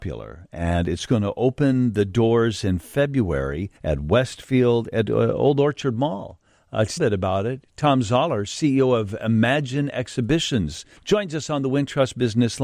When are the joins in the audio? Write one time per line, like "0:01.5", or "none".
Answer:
0:03.8
0:07.0
0:11.0